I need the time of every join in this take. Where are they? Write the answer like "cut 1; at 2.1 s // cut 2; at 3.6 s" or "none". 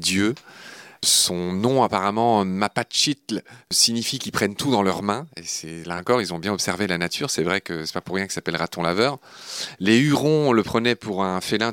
none